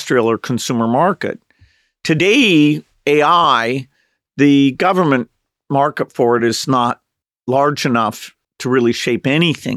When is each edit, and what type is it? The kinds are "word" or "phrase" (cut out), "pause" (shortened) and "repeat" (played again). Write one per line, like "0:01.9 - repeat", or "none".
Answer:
none